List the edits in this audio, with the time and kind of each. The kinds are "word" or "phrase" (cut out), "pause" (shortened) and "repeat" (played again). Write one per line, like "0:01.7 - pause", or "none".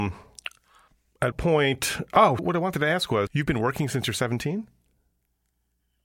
0:01.3 - word
0:02.4 - word
0:03.3 - word